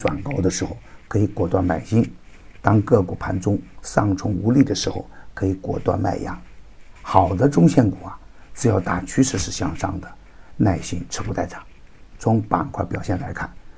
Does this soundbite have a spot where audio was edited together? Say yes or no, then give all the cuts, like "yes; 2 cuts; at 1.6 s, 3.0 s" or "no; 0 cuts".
yes; 1 cut; at 7.0 s